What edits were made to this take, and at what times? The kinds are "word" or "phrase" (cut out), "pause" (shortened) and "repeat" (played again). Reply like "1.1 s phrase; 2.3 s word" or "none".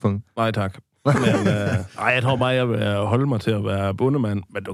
none